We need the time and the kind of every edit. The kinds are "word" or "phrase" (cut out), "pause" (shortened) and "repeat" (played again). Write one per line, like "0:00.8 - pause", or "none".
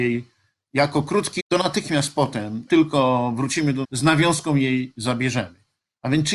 0:01.4 - word
0:02.7 - word
0:03.8 - word